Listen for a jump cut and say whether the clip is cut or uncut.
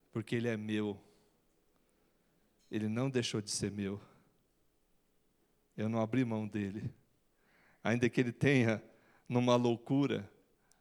uncut